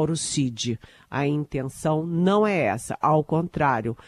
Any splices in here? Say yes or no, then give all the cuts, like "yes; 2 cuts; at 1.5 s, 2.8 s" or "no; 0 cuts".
no; 0 cuts